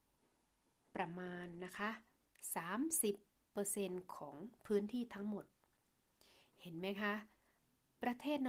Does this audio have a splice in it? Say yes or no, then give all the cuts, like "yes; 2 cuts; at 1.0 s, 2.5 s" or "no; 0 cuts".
no; 0 cuts